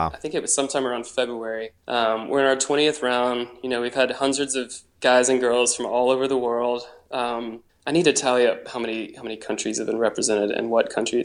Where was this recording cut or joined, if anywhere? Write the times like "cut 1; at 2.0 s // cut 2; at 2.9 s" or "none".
cut 1; at 1.8 s // cut 2; at 7.7 s

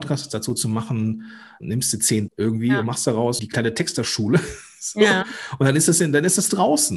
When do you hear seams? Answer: cut 1; at 1.6 s // cut 2; at 2.3 s // cut 3; at 3.4 s

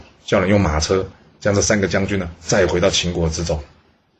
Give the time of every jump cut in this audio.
none

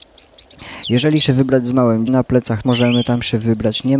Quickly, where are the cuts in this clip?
cut 1; at 1.2 s // cut 2; at 2.1 s // cut 3; at 2.6 s

